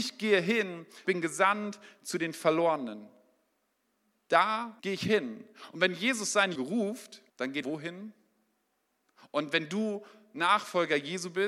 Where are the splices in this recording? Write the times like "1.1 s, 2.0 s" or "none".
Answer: 1.0 s, 4.8 s, 6.5 s, 7.3 s, 7.6 s

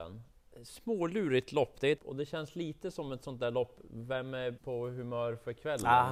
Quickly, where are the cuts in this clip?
2.0 s, 4.6 s

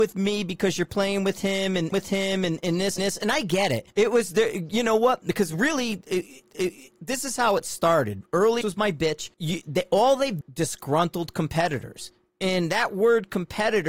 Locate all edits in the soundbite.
1.9 s, 3.0 s, 3.9 s, 6.5 s, 8.6 s, 9.3 s, 10.4 s

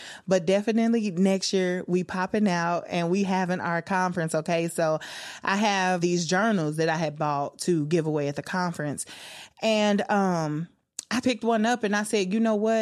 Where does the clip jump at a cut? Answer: 6.0 s, 11.2 s

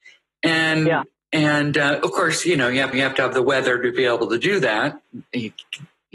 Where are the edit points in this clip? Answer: 2.9 s

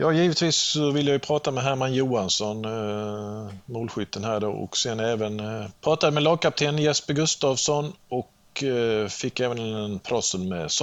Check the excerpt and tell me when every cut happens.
5.8 s

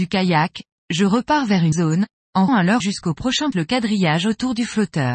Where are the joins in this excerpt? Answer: 1.7 s, 2.5 s, 2.8 s, 3.5 s

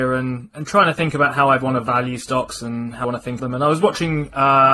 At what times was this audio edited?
3.0 s, 3.4 s

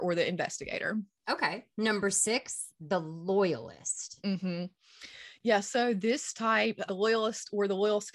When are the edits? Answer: 1.7 s, 6.9 s

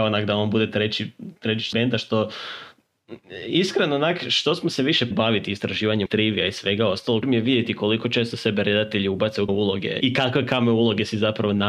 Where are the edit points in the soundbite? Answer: 1.7 s, 5.1 s, 6.1 s, 7.2 s, 9.5 s, 10.0 s

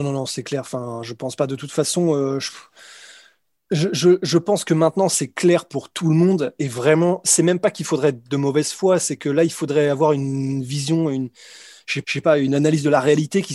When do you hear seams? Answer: 12.0 s

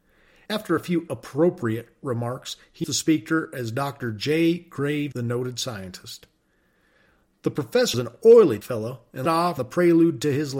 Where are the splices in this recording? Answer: 1.1 s, 2.8 s, 5.1 s, 7.9 s, 8.6 s, 9.3 s, 9.6 s

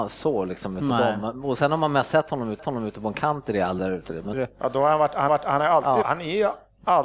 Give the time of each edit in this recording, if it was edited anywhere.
2.6 s, 3.8 s, 4.3 s, 5.3 s, 6.0 s

